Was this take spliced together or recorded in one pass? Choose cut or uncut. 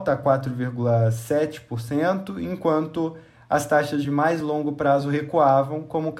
uncut